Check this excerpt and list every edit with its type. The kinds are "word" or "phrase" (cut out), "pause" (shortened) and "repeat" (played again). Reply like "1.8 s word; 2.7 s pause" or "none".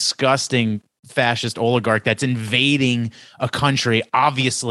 none